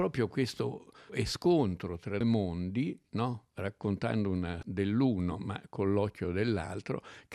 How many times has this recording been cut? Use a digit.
3